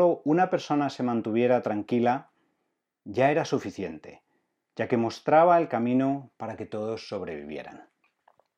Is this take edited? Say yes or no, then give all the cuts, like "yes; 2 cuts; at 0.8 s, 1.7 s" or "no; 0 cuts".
no; 0 cuts